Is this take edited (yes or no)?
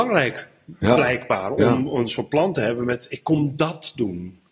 no